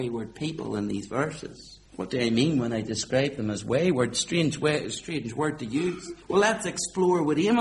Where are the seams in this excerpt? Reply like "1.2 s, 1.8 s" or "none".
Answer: 1.9 s, 6.2 s